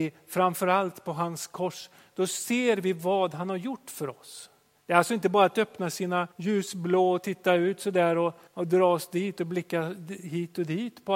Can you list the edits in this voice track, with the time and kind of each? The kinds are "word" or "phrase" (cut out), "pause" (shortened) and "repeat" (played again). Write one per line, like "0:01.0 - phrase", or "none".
0:04.7 - pause
0:06.3 - pause
0:08.5 - pause